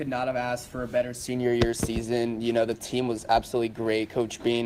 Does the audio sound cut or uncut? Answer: uncut